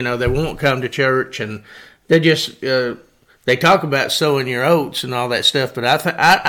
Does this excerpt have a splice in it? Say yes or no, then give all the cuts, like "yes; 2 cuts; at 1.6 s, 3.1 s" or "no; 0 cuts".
no; 0 cuts